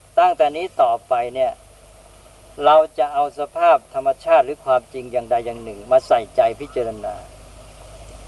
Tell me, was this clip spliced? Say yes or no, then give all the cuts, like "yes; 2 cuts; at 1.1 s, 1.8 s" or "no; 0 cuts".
yes; 1 cut; at 3.8 s